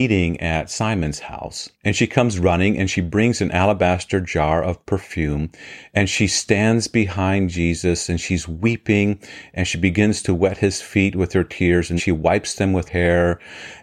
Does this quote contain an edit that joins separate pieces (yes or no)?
yes